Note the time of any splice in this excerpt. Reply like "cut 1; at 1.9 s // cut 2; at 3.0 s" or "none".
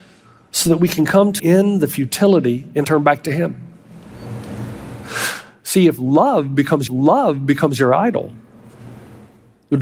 cut 1; at 1.4 s // cut 2; at 2.8 s // cut 3; at 6.9 s